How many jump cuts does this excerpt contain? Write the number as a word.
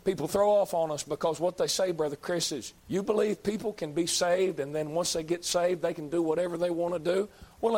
one